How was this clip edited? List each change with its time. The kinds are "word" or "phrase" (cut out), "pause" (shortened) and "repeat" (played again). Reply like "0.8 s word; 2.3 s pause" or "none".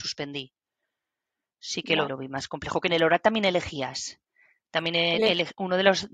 2.1 s word